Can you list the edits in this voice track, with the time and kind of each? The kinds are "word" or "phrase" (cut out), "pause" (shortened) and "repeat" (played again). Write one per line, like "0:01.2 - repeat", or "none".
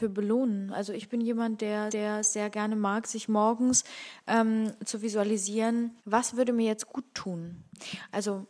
0:01.9 - repeat
0:06.0 - pause